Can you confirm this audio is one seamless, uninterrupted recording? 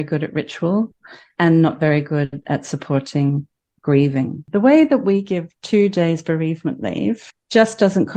yes; 0 cuts

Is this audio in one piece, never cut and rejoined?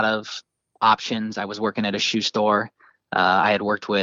yes; 0 cuts

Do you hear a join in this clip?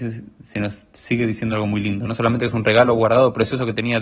no; 0 cuts

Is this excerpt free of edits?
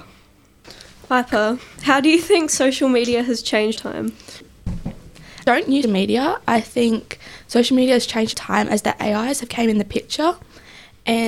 no; 3 cuts; at 3.7 s, 5.8 s, 8.3 s

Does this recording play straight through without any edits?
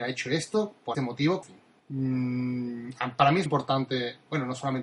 no; 4 cuts; at 0.9 s, 1.4 s, 1.8 s, 3.5 s

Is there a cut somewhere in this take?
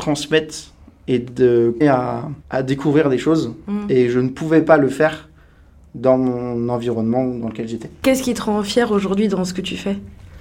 yes; 2 cuts; at 1.8 s, 2.4 s

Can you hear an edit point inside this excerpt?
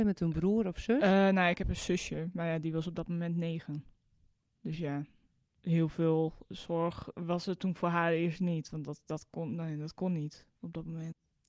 no; 0 cuts

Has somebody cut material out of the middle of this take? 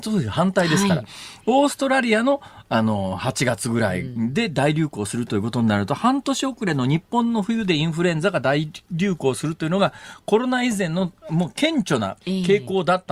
yes; 1 cut; at 11.2 s

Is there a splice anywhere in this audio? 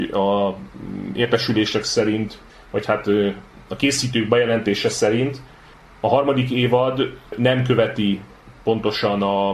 yes; 1 cut; at 2.5 s

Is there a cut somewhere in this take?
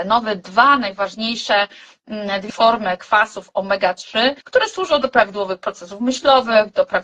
yes; 2 cuts; at 2.5 s, 4.4 s

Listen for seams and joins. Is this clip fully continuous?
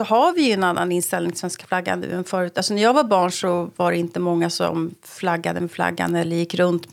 yes; 0 cuts

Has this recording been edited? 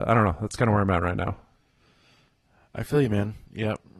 no; 0 cuts

